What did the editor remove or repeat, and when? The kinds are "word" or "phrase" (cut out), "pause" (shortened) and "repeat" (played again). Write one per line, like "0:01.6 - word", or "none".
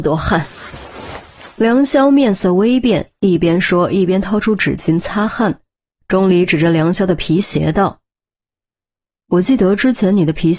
none

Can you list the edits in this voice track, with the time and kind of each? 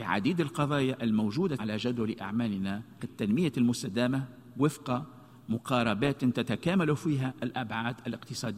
0:01.6 - word
0:03.0 - phrase

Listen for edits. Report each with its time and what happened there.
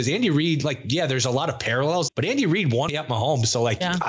0:02.1 - word
0:02.9 - word

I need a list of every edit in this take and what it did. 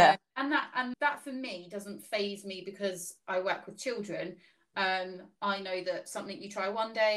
0:00.9 - word

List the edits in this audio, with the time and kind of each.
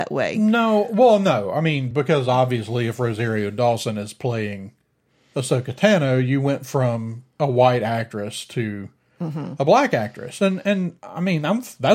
none

